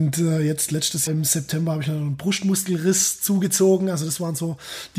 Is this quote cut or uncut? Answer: cut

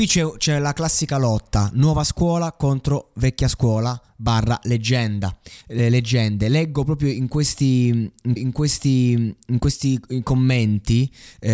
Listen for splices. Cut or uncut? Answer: cut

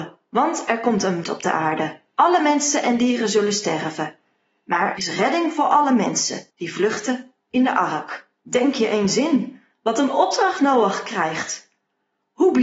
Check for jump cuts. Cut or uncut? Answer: cut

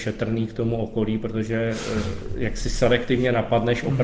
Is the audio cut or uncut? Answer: uncut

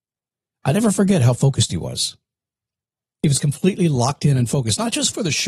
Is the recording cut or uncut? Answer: uncut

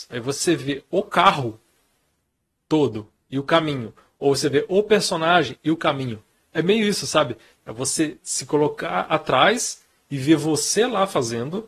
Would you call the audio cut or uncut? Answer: uncut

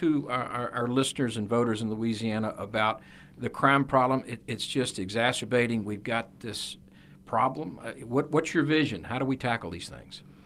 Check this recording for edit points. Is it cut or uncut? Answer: uncut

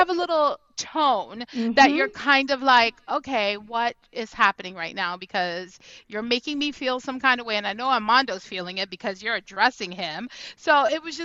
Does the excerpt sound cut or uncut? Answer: uncut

